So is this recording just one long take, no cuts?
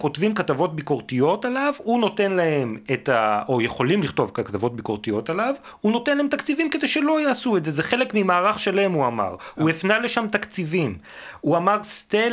yes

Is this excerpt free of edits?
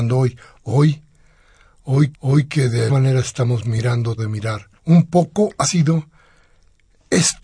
no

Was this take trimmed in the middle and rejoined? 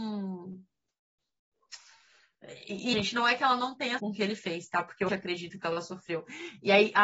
yes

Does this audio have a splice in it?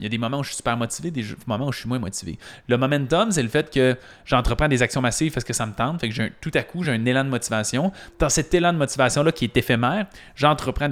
no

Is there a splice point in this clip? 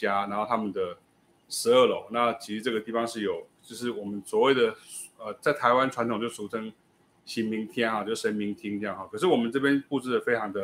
no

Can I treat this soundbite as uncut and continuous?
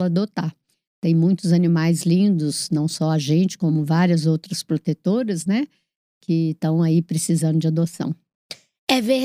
yes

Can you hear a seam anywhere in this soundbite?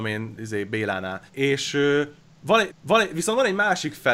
yes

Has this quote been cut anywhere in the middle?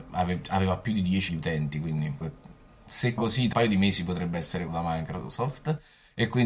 yes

